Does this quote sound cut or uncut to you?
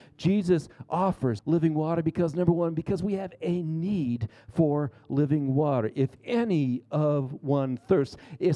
cut